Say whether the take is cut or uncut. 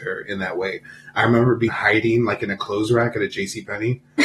cut